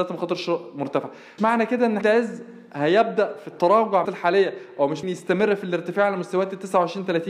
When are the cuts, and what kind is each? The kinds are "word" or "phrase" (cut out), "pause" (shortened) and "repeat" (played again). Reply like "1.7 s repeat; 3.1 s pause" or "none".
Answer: 1.4 s word; 2.0 s word; 4.0 s word; 5.0 s word